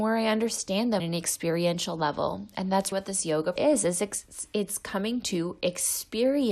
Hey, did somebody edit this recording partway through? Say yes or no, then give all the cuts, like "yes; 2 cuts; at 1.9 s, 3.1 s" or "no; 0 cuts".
yes; 3 cuts; at 1.0 s, 2.9 s, 3.6 s